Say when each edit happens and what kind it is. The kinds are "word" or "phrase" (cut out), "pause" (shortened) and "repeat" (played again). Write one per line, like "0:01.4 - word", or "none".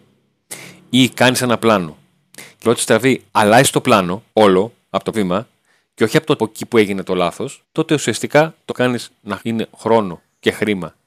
0:02.6 - word
0:03.3 - pause
0:04.3 - pause
0:05.1 - word
0:06.4 - phrase
0:07.6 - pause
0:08.7 - word
0:09.4 - word